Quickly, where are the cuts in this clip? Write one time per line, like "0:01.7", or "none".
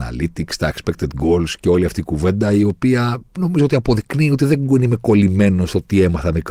0:03.3